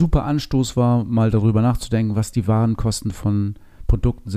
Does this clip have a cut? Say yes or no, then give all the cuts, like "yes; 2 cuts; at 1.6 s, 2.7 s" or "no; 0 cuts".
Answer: no; 0 cuts